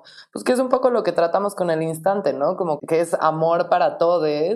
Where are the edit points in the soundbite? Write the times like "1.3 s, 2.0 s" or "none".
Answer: 2.8 s